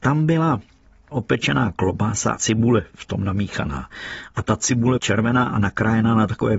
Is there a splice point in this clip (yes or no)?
yes